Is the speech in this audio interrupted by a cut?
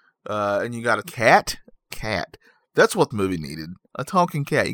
yes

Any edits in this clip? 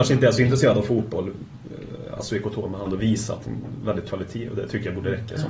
yes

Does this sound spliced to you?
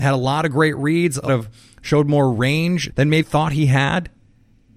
yes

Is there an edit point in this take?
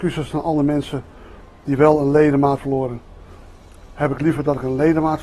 yes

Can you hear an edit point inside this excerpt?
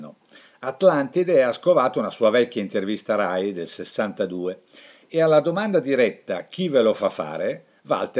no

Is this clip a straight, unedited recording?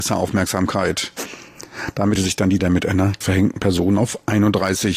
no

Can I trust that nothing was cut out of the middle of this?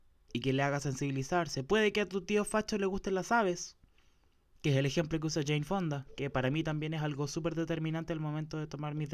yes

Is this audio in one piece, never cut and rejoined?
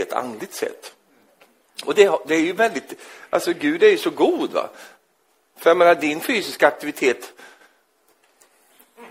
yes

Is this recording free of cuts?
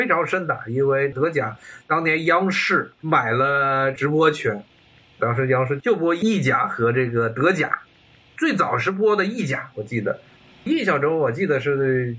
yes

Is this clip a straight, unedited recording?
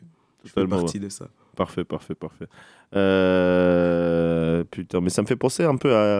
yes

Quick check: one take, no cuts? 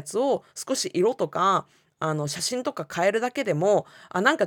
yes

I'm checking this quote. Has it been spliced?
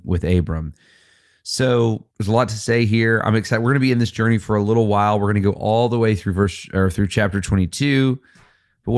yes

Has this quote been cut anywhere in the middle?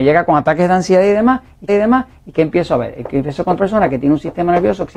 yes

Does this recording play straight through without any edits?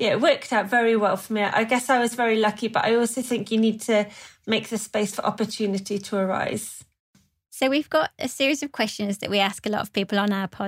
yes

